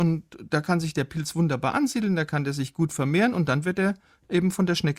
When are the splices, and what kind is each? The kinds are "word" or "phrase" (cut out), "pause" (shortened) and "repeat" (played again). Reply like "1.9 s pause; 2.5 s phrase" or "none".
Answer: none